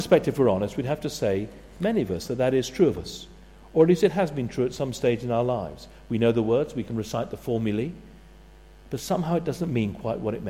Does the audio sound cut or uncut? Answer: uncut